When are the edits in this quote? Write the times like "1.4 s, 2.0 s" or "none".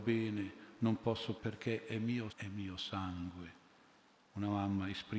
1.4 s, 2.3 s